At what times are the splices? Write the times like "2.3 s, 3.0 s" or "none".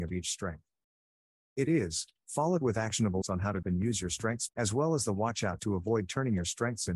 2.1 s, 3.2 s, 3.6 s, 4.5 s, 5.6 s